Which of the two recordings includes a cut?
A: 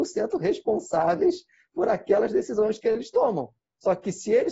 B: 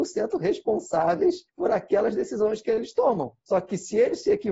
B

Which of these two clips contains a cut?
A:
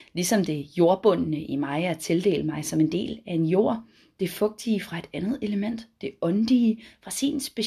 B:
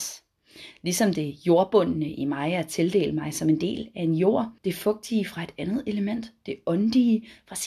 B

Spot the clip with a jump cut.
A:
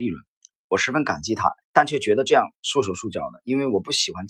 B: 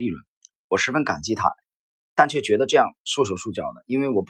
A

